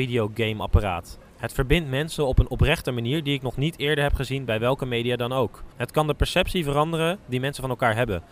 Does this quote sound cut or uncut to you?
cut